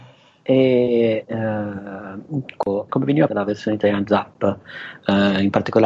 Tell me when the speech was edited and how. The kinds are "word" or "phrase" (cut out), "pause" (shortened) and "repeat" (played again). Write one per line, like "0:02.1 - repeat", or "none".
0:02.9 - word
0:03.3 - word
0:04.0 - word